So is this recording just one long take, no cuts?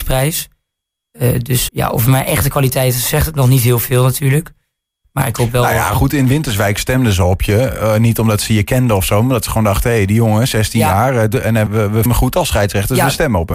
no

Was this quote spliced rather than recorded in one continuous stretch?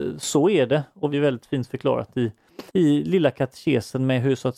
yes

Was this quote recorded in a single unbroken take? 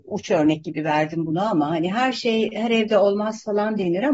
yes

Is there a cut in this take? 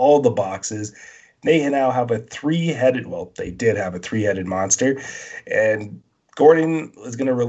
no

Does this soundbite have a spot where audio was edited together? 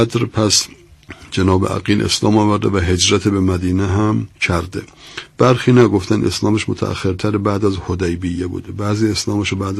yes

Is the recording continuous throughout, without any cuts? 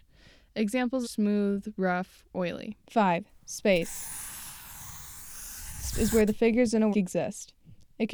no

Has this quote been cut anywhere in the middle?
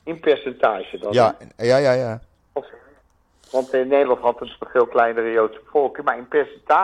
no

